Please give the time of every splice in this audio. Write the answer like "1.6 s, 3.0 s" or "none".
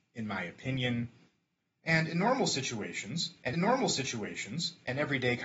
3.5 s